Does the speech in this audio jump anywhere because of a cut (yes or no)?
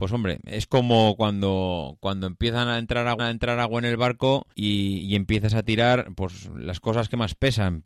yes